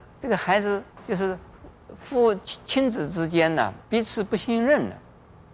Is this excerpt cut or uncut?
cut